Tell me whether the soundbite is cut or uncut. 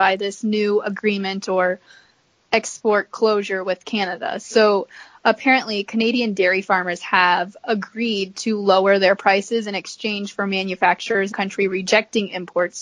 cut